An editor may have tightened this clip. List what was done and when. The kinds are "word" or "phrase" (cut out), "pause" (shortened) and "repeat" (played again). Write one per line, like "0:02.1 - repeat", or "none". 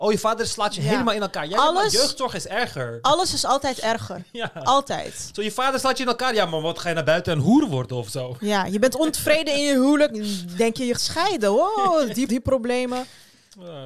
0:10.9 - word
0:12.3 - word